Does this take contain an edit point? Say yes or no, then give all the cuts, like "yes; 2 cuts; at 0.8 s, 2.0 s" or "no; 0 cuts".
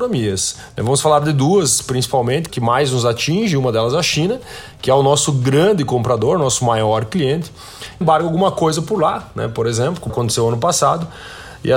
yes; 3 cuts; at 2.5 s, 8.0 s, 10.1 s